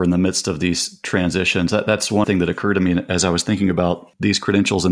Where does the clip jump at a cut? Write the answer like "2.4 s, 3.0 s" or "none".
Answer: 2.2 s